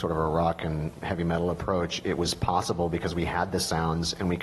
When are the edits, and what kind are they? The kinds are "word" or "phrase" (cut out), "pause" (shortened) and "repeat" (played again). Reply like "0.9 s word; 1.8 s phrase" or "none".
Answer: none